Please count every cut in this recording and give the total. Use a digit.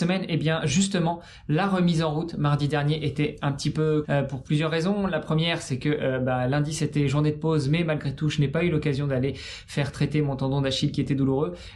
1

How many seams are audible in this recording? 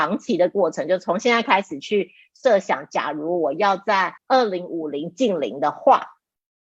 1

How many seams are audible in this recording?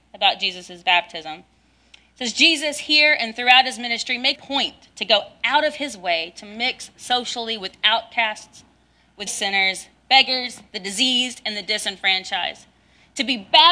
2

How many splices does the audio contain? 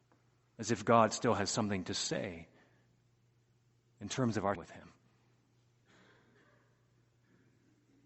1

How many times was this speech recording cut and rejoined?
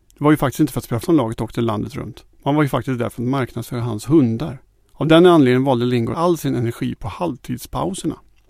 4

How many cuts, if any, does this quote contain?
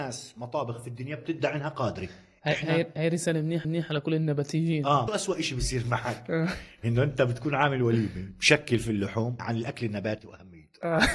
3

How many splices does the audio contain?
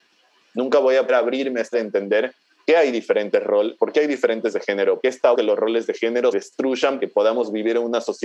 9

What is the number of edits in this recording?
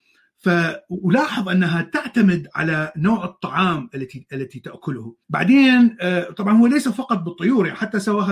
1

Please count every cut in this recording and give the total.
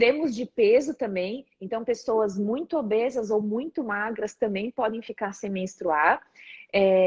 0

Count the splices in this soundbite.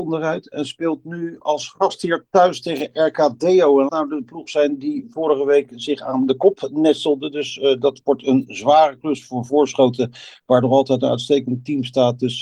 1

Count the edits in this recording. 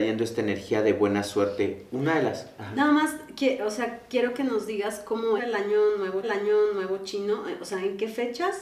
2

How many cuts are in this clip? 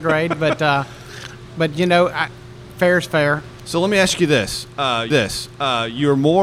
1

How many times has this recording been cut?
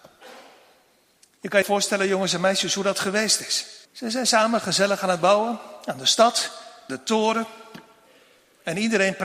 3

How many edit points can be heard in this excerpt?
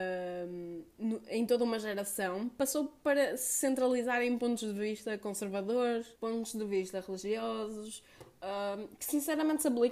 1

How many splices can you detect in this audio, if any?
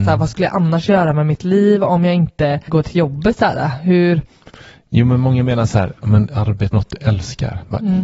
2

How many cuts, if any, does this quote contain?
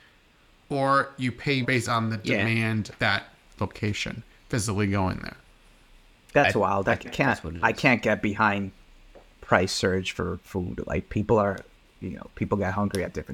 3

